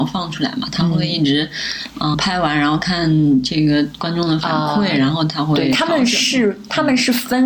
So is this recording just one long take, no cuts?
no; 1 cut; at 2.1 s

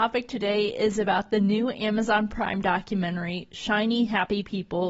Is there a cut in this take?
no; 0 cuts

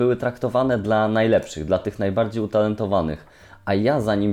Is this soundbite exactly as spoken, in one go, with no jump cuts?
yes; 0 cuts

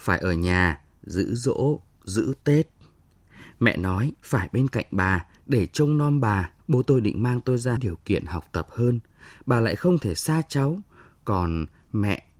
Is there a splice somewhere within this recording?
yes; 3 cuts; at 4.2 s, 6.6 s, 7.8 s

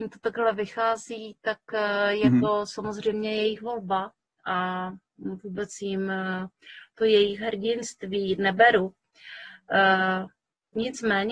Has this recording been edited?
no; 0 cuts

